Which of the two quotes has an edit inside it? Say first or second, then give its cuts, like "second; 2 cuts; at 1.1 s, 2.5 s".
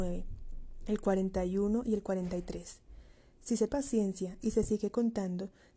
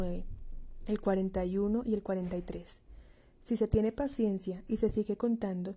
first; 1 cut; at 3.7 s